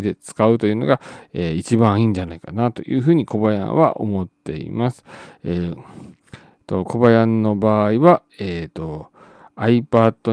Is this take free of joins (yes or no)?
yes